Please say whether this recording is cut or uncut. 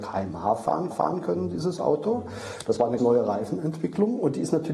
cut